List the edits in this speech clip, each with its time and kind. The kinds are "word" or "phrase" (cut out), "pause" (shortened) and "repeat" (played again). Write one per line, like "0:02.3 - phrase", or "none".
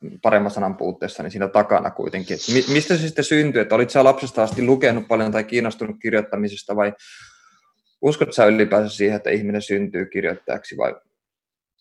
none